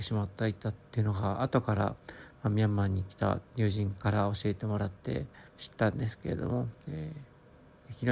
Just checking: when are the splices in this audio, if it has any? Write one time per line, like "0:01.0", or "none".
0:03.5
0:05.5
0:06.8